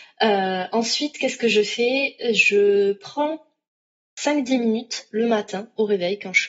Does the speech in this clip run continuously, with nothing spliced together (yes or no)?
yes